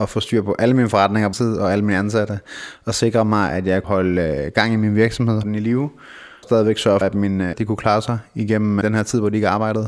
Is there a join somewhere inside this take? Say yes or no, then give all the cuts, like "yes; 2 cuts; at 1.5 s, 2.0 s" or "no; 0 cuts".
yes; 7 cuts; at 1.3 s, 3.8 s, 5.4 s, 6.4 s, 7.0 s, 7.5 s, 8.8 s